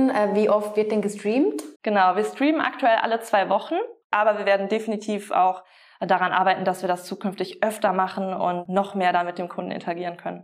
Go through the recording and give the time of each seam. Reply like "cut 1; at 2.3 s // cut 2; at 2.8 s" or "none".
cut 1; at 1.8 s // cut 2; at 4.0 s